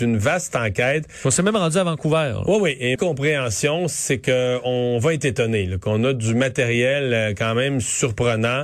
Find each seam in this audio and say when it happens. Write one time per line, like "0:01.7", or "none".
0:03.0